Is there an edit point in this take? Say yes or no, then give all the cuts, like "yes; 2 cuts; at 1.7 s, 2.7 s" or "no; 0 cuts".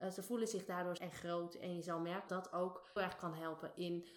yes; 3 cuts; at 1.0 s, 2.3 s, 3.0 s